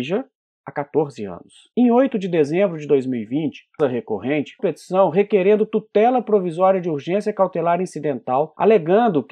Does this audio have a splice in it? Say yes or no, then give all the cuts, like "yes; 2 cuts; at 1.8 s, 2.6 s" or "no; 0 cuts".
yes; 3 cuts; at 1.7 s, 3.8 s, 4.6 s